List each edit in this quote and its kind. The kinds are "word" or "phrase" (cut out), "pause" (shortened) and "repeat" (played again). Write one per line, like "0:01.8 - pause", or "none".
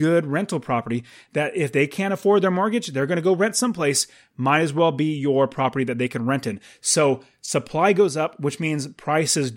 none